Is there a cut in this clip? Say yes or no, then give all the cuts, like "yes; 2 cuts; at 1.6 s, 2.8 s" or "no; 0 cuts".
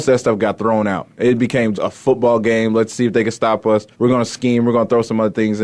yes; 2 cuts; at 1.7 s, 3.9 s